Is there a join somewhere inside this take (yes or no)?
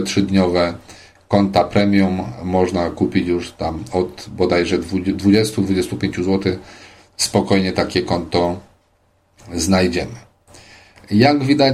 no